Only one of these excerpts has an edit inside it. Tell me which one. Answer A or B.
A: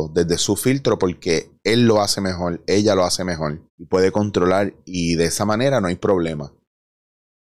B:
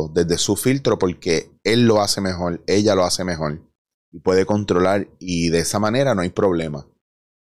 A